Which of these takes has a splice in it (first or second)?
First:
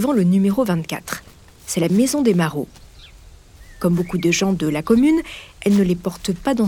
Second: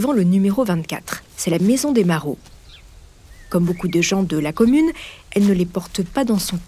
second